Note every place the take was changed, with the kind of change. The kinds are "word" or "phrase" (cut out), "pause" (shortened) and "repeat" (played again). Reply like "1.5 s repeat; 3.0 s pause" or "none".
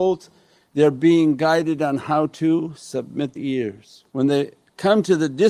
3.4 s word; 4.1 s pause